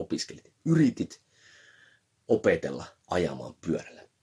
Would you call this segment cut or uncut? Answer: uncut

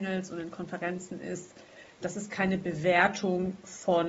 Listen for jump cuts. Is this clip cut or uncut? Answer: cut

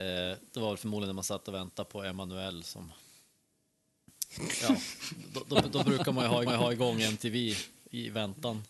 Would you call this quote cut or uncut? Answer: cut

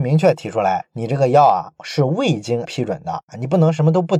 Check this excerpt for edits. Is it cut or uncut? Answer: cut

